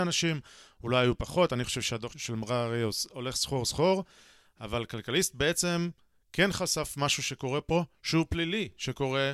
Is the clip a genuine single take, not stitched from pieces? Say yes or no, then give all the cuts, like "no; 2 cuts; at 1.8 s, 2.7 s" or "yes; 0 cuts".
no; 1 cut; at 2.1 s